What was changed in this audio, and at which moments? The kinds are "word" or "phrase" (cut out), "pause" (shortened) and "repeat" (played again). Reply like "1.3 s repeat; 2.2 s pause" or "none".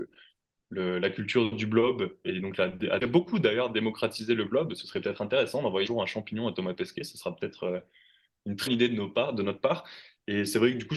2.2 s word; 3.0 s word; 5.8 s word; 8.7 s word